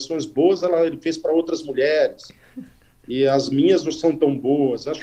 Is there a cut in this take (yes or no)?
no